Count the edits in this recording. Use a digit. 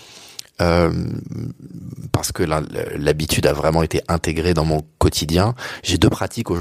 0